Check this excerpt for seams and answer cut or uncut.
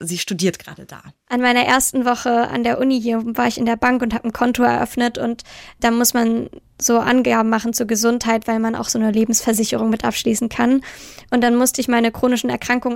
cut